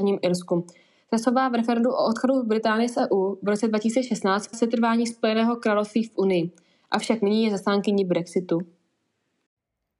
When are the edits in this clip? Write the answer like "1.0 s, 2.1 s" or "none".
4.5 s